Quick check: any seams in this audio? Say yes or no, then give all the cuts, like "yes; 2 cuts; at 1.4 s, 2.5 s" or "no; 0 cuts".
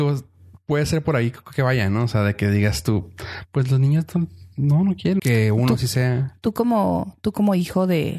yes; 1 cut; at 5.2 s